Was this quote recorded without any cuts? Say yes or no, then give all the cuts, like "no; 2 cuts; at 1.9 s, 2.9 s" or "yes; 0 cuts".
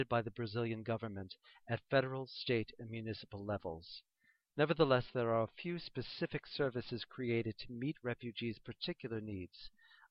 yes; 0 cuts